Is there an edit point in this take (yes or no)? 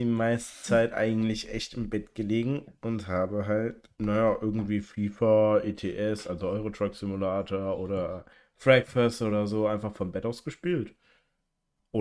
yes